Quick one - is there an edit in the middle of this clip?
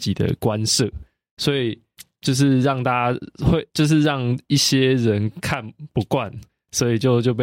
no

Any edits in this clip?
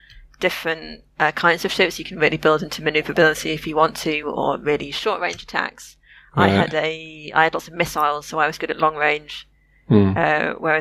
no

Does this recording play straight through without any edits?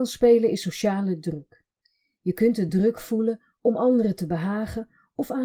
yes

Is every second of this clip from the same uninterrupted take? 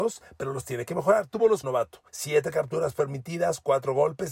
no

